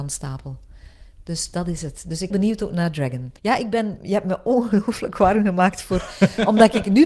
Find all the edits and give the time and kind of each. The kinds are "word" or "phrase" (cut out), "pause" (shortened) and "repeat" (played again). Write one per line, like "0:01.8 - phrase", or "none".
0:02.3 - phrase
0:03.4 - pause
0:04.0 - word